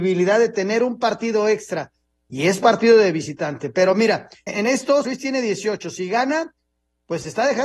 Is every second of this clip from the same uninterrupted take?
no; 2 cuts; at 4.5 s, 5.0 s

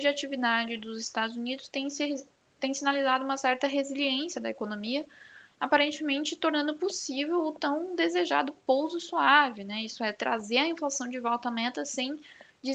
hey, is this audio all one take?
yes; 0 cuts

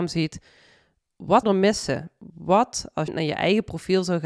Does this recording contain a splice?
yes; 2 cuts; at 1.4 s, 3.1 s

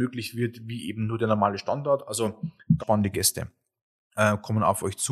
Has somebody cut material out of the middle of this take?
yes; 1 cut; at 2.8 s

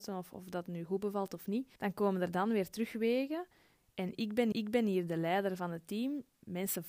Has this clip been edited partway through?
yes; 2 cuts; at 1.8 s, 4.5 s

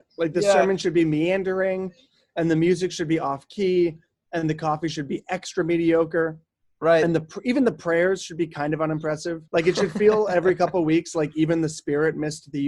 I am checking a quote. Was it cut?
yes; 1 cut; at 9.5 s

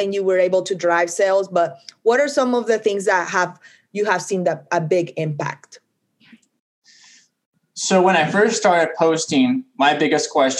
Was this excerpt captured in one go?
yes; 0 cuts

